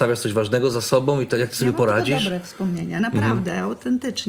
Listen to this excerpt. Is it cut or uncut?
uncut